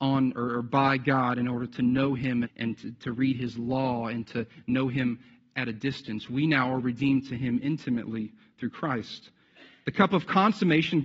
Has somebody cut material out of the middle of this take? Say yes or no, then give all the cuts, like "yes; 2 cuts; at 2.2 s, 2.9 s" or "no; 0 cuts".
yes; 1 cut; at 2.4 s